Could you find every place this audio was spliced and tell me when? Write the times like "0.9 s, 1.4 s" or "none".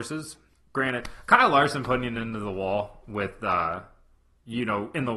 none